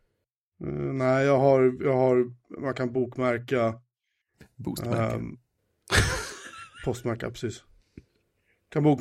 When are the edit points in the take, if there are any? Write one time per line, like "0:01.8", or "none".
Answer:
none